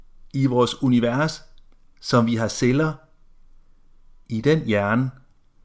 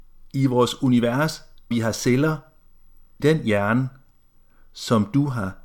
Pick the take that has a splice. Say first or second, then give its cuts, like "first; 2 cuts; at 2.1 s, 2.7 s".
second; 2 cuts; at 1.7 s, 3.2 s